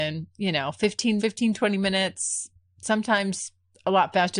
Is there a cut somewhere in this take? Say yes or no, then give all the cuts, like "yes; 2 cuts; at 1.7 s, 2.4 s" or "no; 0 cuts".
yes; 2 cuts; at 1.2 s, 2.6 s